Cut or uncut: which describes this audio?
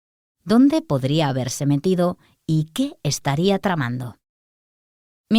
uncut